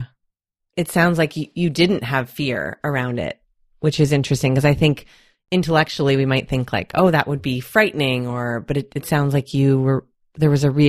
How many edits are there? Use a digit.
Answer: 0